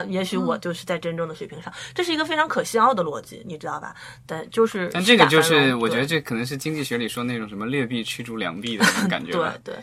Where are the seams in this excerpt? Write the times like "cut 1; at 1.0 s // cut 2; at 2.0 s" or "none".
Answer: none